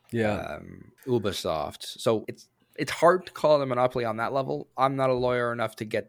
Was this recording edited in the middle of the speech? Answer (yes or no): yes